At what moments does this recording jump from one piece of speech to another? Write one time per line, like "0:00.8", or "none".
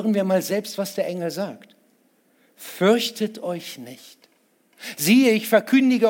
none